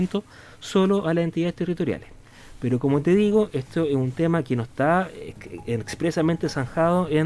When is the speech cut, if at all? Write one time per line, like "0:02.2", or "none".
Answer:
none